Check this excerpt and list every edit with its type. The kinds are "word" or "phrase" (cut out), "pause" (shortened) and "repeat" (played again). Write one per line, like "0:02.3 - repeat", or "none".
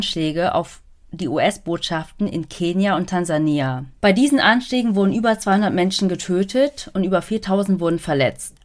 0:04.0 - pause